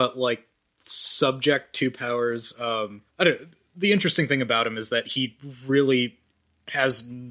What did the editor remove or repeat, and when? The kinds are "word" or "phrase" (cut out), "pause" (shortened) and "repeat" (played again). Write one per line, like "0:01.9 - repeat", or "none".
0:03.1 - pause